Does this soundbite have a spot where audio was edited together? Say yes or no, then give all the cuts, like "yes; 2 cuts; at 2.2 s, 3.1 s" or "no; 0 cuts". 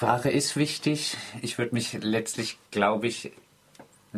yes; 1 cut; at 2.7 s